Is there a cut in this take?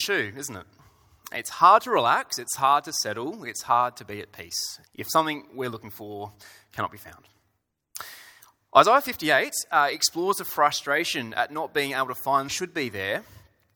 yes; 2 cuts; at 4.9 s, 12.5 s

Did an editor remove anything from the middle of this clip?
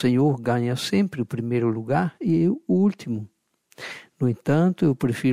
no; 0 cuts

